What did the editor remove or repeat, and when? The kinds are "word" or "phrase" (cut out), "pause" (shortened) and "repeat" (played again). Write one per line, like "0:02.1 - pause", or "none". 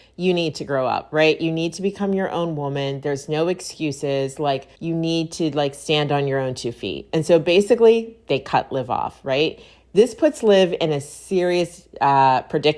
0:04.8 - pause